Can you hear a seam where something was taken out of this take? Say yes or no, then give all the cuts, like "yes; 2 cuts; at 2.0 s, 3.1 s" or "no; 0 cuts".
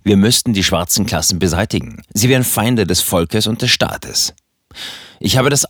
yes; 1 cut; at 2.1 s